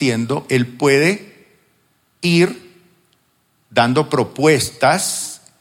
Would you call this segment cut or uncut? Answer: uncut